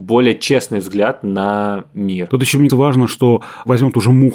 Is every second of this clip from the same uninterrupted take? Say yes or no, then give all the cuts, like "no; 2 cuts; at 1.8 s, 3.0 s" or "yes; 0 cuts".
no; 1 cut; at 2.7 s